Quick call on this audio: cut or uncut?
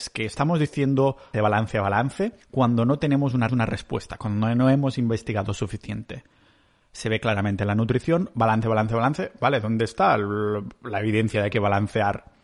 cut